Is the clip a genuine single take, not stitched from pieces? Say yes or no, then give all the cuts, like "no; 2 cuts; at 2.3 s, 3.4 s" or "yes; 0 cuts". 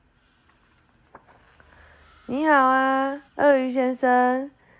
no; 1 cut; at 3.3 s